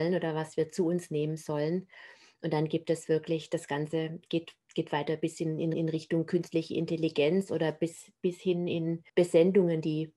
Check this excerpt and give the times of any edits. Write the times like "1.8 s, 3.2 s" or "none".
5.7 s, 9.1 s